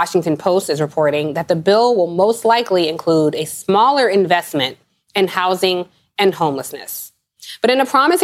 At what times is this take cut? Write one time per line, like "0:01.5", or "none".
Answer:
none